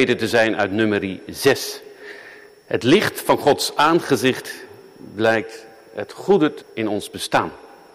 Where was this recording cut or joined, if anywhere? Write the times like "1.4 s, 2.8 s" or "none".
6.6 s